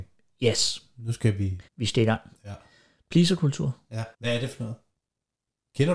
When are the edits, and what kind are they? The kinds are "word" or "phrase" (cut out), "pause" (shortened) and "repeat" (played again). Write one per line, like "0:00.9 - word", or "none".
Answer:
0:01.7 - pause
0:04.1 - pause